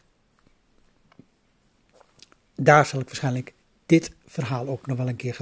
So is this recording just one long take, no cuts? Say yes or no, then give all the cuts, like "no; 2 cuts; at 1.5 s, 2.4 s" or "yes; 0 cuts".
yes; 0 cuts